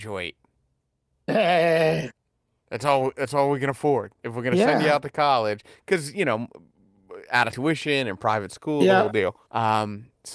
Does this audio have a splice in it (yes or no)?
yes